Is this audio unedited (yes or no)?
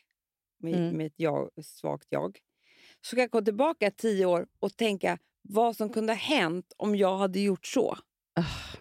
yes